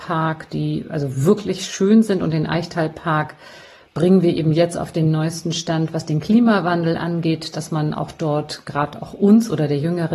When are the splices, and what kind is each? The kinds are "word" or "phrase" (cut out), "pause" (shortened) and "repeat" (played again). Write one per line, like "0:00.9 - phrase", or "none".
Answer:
none